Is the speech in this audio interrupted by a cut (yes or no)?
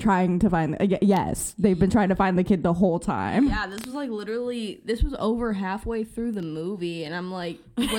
no